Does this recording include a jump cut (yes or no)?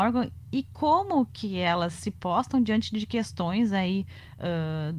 no